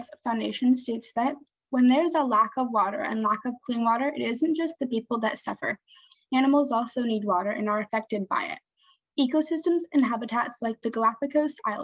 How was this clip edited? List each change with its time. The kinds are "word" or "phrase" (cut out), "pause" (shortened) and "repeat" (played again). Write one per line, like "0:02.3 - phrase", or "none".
none